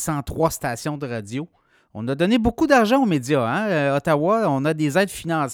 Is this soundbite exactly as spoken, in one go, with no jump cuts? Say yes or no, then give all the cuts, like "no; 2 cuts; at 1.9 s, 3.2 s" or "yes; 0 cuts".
yes; 0 cuts